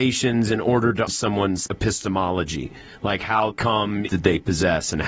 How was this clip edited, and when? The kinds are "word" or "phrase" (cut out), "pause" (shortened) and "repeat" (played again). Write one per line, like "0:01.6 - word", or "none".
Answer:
0:01.1 - word
0:01.7 - word
0:03.5 - word
0:04.1 - phrase